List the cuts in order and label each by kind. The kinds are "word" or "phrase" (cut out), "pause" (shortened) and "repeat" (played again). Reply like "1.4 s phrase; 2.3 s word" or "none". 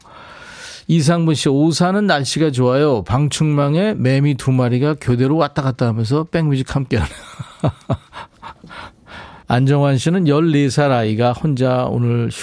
9.4 s pause